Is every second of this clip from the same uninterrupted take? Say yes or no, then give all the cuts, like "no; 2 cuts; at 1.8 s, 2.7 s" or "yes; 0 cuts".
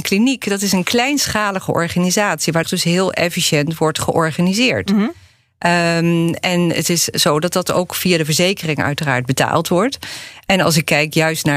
no; 2 cuts; at 2.6 s, 7.1 s